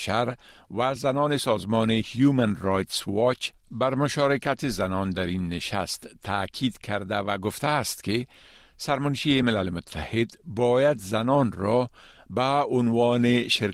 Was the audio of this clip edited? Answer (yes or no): no